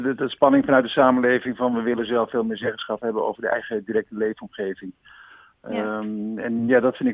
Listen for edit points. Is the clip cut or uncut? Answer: uncut